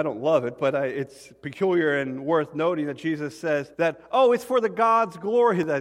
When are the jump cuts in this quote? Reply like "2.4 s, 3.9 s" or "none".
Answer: 3.7 s